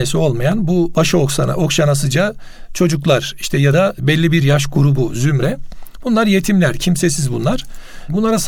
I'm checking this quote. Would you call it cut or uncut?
uncut